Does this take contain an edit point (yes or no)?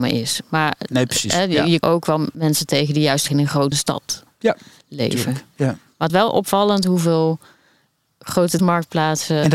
yes